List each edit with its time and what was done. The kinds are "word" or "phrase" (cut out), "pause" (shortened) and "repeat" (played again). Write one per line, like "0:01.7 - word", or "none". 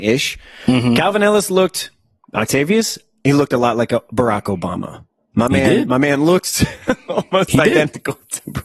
none